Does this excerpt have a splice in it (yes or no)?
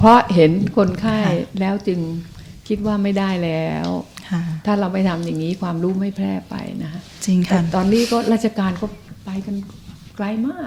yes